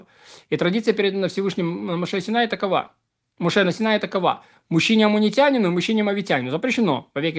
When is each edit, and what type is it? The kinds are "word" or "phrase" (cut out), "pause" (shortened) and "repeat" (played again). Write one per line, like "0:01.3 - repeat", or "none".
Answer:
none